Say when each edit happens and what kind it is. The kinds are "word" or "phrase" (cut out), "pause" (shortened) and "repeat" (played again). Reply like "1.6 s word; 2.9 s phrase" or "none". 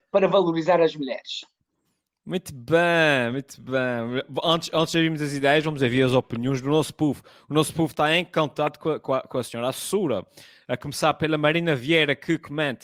none